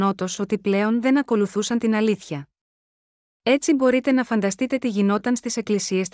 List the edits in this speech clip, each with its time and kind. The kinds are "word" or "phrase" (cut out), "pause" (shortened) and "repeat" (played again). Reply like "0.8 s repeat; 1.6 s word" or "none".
none